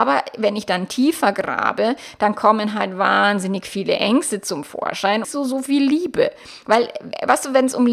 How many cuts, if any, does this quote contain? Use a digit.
1